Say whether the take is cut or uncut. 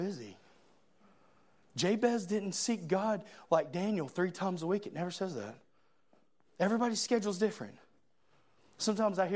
uncut